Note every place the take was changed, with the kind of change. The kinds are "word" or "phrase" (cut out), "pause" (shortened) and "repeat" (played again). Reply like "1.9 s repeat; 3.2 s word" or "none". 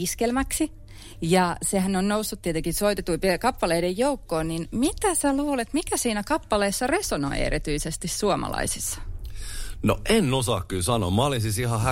none